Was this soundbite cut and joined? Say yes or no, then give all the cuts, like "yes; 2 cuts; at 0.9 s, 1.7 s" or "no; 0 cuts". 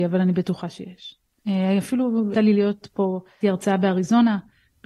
yes; 2 cuts; at 2.3 s, 3.4 s